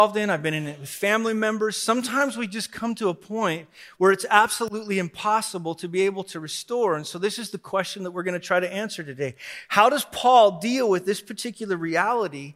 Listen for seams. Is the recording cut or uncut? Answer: uncut